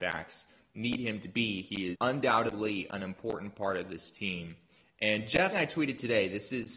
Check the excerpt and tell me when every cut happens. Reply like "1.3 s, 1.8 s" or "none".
1.9 s, 5.5 s